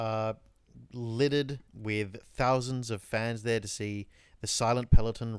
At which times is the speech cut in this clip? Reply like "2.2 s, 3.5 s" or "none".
1.7 s